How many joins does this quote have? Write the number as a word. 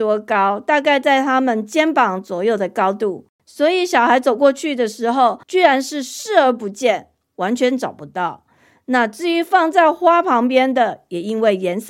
two